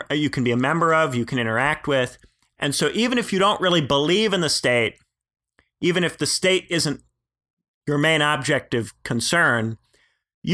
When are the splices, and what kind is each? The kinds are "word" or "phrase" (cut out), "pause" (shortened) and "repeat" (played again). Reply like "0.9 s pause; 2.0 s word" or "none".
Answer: none

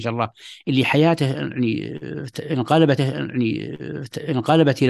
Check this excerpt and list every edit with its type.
3.0 s repeat

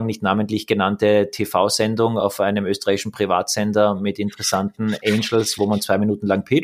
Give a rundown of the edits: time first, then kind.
none

